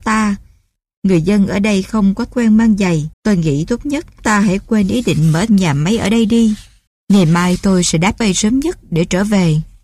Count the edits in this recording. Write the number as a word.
six